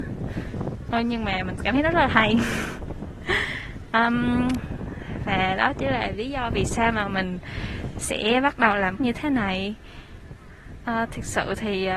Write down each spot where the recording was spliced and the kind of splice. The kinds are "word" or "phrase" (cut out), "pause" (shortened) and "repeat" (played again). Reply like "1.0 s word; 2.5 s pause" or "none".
9.0 s word